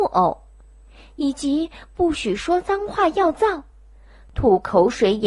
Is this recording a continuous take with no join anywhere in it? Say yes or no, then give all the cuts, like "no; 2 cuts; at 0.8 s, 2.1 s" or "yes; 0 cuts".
yes; 0 cuts